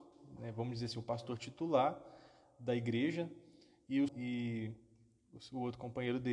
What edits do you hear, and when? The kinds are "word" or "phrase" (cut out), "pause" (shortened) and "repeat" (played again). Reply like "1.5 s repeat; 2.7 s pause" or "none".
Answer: 4.1 s word